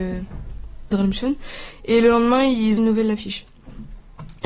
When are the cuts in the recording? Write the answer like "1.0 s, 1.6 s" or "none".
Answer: 0.9 s, 2.8 s